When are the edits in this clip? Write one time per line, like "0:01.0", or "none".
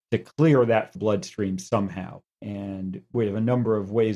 0:01.0
0:02.3